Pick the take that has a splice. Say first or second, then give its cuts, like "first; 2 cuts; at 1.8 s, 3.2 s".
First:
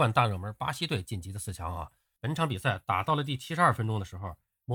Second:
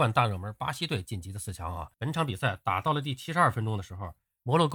second; 1 cut; at 1.9 s